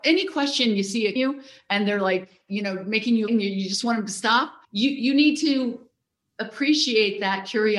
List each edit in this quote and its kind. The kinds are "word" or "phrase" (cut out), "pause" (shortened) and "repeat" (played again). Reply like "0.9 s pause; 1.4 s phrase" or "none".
1.2 s phrase; 3.3 s word; 4.6 s pause